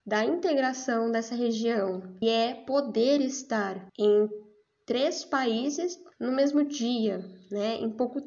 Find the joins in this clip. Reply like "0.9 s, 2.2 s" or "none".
2.2 s, 3.9 s, 6.1 s